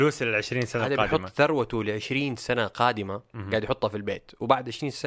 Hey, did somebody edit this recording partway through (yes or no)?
no